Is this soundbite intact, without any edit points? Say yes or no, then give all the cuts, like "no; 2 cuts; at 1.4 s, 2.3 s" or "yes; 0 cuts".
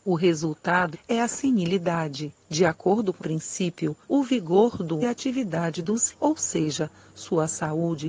no; 6 cuts; at 0.9 s, 2.4 s, 3.2 s, 4.0 s, 5.0 s, 6.1 s